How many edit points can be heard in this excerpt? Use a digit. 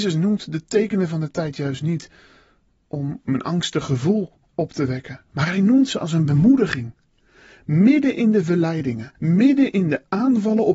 1